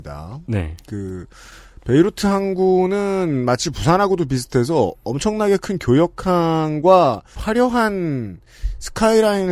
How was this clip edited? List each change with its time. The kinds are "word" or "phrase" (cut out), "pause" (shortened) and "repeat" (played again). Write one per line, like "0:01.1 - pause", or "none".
none